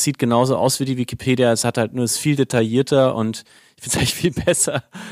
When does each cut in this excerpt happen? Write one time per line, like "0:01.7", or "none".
none